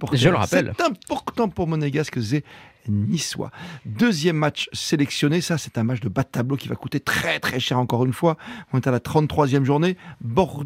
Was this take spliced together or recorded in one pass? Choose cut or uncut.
uncut